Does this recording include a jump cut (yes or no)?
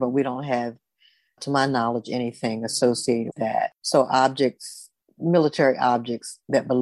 yes